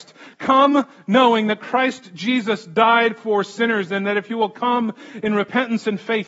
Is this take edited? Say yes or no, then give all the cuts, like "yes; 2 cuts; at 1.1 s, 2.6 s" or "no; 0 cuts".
no; 0 cuts